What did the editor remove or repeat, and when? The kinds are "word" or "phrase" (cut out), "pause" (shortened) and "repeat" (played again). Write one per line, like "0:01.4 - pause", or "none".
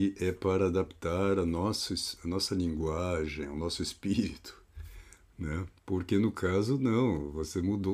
0:05.8 - pause